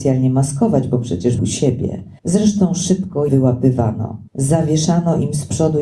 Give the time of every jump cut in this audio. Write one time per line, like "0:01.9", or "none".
0:01.4
0:02.2
0:03.3
0:04.3